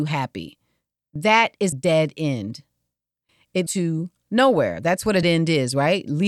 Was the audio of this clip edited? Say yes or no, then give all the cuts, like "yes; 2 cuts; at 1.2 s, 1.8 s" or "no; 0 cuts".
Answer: yes; 3 cuts; at 1.7 s, 3.7 s, 5.2 s